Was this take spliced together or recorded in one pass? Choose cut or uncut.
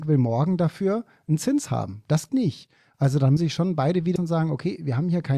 cut